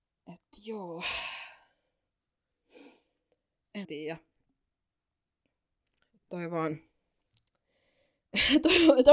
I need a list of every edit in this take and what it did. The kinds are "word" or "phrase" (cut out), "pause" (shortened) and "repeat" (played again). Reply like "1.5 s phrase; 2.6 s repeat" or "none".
3.8 s word